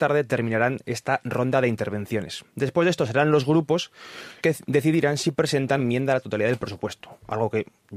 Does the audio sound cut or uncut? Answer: cut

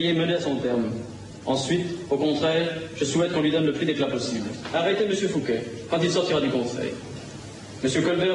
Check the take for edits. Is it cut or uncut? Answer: uncut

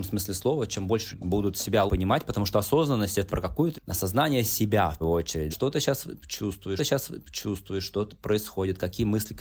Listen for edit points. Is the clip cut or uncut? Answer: cut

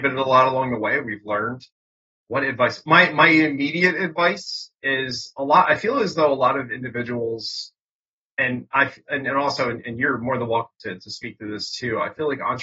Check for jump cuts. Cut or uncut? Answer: uncut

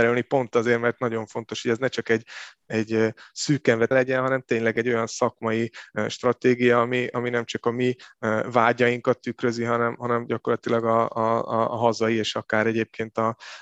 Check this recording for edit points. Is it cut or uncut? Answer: cut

